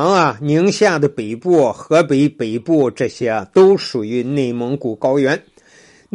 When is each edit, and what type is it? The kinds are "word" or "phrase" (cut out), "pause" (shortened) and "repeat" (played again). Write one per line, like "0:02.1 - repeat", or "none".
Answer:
none